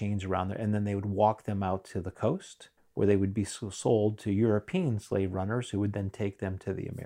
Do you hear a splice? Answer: yes; 1 cut; at 2.8 s

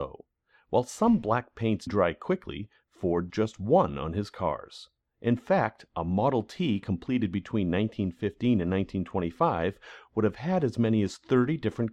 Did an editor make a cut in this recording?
yes; 2 cuts; at 1.9 s, 3.3 s

